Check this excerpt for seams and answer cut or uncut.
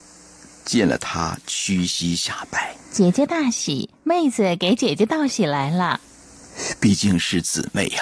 cut